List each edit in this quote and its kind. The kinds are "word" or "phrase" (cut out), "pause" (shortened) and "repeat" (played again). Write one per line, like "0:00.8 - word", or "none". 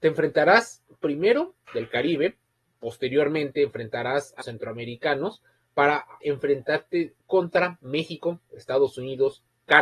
0:01.7 - phrase
0:04.4 - word
0:06.2 - word
0:07.2 - pause